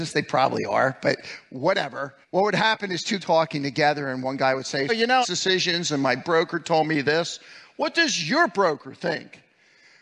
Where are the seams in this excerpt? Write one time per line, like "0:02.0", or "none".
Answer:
0:02.2
0:03.2
0:04.9
0:05.2